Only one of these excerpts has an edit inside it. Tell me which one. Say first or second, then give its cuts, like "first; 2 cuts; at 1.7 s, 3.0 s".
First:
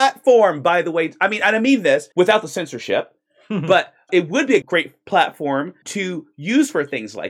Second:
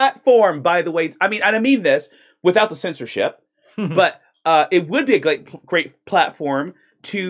first; 4 cuts; at 2.1 s, 4.1 s, 4.6 s, 5.8 s